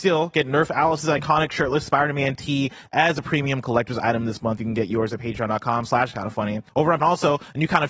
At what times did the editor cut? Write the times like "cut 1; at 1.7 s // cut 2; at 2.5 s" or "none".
cut 1; at 6.7 s // cut 2; at 7.0 s